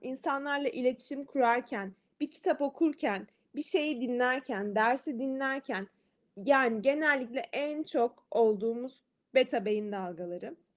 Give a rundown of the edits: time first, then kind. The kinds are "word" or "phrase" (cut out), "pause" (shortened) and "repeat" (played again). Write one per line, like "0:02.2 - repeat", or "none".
0:09.1 - word